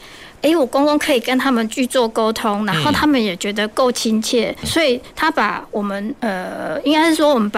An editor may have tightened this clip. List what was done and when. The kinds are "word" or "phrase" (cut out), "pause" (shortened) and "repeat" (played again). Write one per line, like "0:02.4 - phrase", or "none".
0:04.6 - word